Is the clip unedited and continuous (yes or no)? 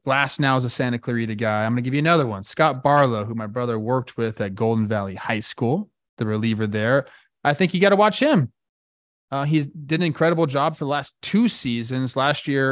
yes